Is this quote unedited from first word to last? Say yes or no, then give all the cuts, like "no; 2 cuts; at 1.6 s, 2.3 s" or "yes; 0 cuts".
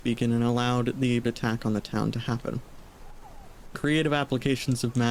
no; 2 cuts; at 1.2 s, 3.8 s